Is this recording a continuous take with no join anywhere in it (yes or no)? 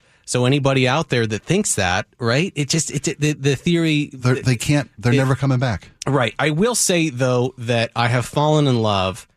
yes